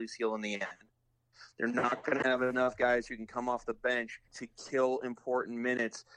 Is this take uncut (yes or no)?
no